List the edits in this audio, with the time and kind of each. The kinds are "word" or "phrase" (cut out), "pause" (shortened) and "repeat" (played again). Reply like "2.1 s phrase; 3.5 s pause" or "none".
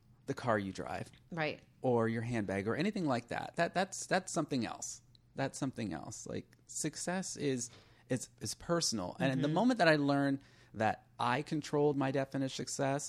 none